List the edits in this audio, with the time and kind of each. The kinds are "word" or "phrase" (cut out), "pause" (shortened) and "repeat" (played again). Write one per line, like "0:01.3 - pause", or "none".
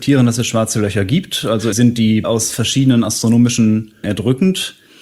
0:01.7 - word
0:02.2 - word
0:04.0 - word